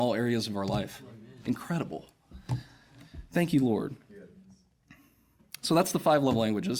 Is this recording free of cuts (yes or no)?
yes